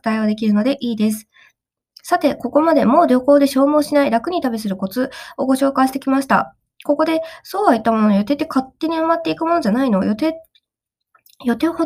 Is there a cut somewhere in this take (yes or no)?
no